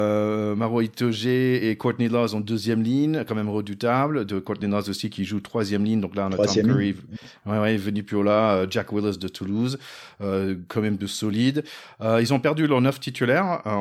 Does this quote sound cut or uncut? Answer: uncut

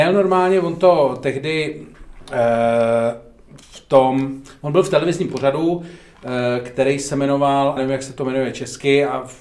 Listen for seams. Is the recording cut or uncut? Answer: cut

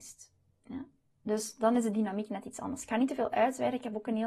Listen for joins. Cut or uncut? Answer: uncut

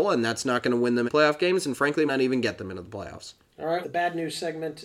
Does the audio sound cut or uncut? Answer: cut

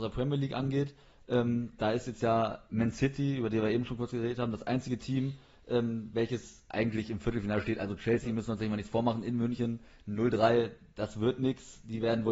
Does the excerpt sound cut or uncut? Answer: uncut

